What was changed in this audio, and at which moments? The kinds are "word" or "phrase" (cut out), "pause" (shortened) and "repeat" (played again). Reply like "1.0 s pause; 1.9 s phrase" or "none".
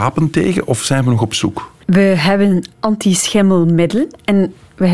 1.8 s pause; 2.7 s pause